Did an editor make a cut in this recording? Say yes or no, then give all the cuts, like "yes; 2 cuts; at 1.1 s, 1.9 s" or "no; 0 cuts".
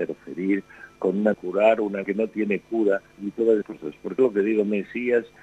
yes; 5 cuts; at 1.3 s, 2.0 s, 3.1 s, 3.6 s, 4.2 s